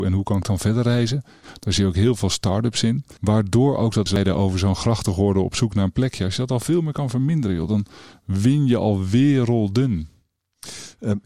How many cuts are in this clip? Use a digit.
2